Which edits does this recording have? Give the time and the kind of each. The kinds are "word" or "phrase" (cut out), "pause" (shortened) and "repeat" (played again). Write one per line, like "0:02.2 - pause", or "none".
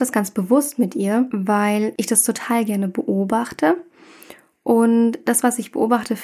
none